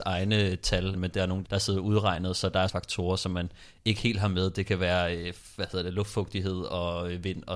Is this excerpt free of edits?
no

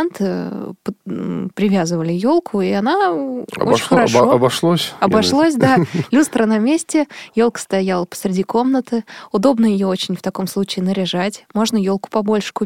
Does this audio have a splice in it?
no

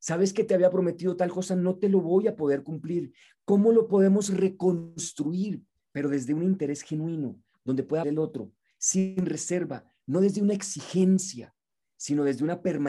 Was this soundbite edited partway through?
yes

